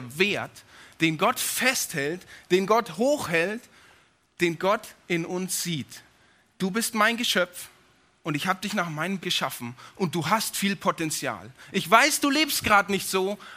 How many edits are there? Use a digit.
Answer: 1